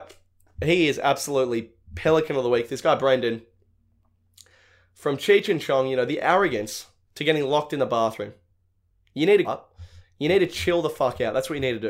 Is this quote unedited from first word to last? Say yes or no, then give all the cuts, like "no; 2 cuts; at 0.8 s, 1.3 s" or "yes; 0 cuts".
no; 1 cut; at 9.4 s